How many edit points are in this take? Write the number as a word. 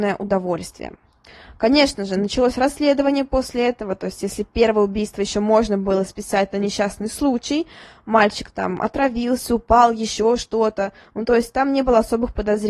zero